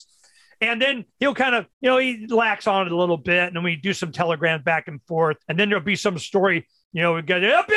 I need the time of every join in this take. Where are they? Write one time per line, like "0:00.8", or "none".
0:01.7
0:05.4